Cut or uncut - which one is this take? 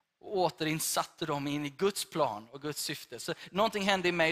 uncut